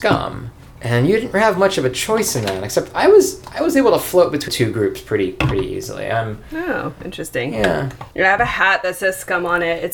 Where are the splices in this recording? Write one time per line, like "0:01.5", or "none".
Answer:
0:04.5
0:08.1